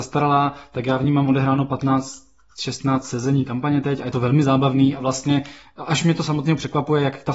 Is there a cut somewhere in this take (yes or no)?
no